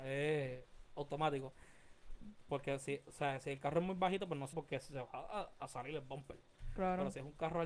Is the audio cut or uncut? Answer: cut